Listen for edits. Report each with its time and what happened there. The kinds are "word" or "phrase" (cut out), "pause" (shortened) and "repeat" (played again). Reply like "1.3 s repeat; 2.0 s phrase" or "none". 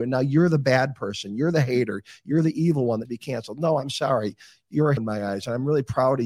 3.0 s word; 5.0 s word